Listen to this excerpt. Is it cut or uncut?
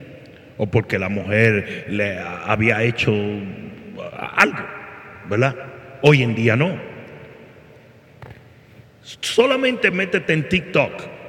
uncut